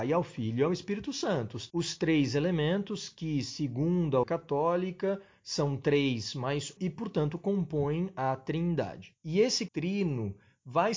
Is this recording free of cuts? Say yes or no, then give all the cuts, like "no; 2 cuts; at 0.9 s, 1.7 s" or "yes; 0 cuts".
no; 4 cuts; at 4.2 s, 6.8 s, 9.2 s, 9.7 s